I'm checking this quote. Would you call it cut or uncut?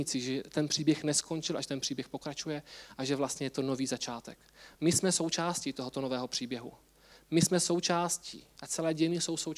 uncut